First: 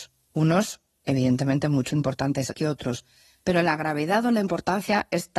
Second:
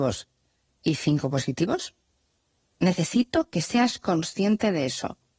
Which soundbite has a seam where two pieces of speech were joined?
first; 2 cuts; at 1.9 s, 2.5 s

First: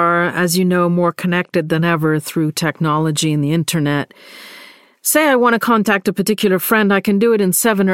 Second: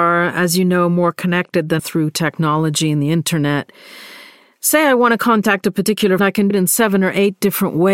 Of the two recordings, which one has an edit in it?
second; 3 cuts; at 1.8 s, 6.2 s, 6.5 s

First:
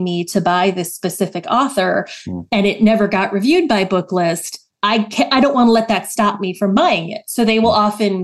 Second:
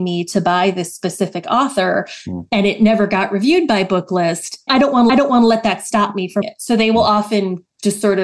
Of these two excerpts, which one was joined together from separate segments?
second; 3 cuts; at 4.7 s, 5.1 s, 6.4 s

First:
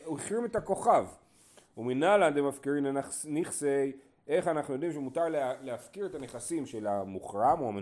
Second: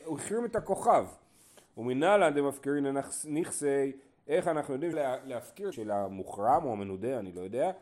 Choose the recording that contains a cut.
second; 2 cuts; at 4.9 s, 5.7 s

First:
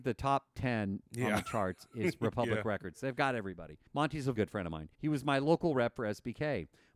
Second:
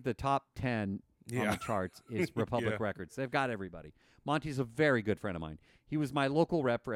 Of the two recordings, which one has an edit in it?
first; 4 cuts; at 1.1 s, 3.9 s, 4.3 s, 4.9 s

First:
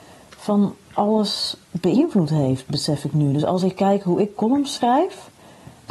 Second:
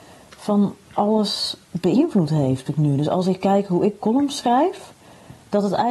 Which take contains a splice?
second; 1 cut; at 2.7 s

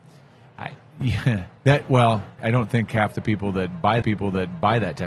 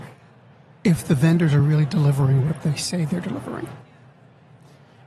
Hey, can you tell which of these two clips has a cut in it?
first; 3 cuts; at 1.6 s, 2.4 s, 4.0 s

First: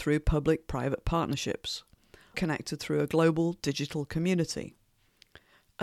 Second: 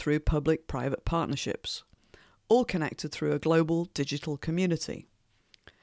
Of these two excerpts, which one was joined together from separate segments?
first; 1 cut; at 2.3 s

